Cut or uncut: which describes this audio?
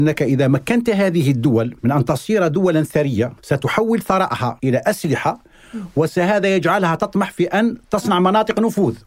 cut